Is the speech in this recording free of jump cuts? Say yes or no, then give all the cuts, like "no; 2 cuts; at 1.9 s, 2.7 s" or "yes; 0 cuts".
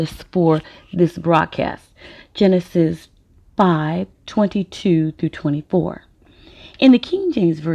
no; 1 cut; at 4.1 s